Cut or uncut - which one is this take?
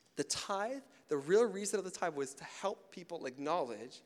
uncut